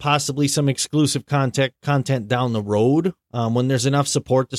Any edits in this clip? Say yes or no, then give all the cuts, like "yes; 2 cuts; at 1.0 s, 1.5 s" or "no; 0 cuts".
yes; 2 cuts; at 1.8 s, 3.2 s